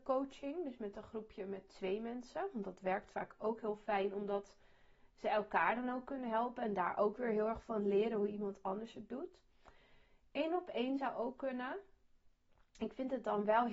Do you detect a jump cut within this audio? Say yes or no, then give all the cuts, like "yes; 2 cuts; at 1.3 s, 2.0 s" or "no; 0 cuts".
no; 0 cuts